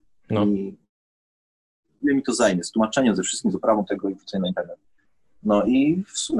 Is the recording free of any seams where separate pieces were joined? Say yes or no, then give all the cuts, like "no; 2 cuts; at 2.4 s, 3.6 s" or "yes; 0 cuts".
yes; 0 cuts